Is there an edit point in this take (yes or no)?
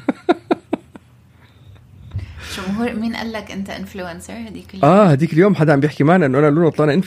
no